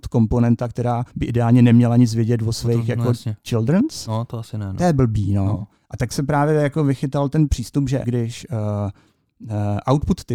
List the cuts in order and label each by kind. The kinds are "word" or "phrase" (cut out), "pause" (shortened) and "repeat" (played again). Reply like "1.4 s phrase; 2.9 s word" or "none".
1.1 s pause; 8.0 s word